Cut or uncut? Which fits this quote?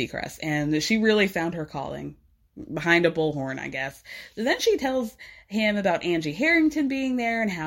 uncut